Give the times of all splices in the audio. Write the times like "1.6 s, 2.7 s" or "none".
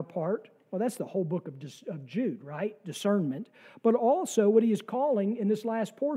none